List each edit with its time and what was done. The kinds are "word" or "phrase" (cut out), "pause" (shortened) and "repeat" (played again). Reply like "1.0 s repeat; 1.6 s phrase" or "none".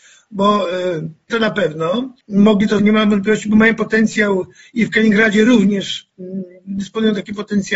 1.3 s word; 2.2 s pause; 2.8 s phrase